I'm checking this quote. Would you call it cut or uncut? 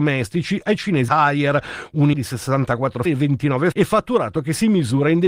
cut